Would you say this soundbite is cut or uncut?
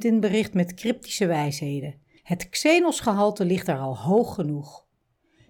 uncut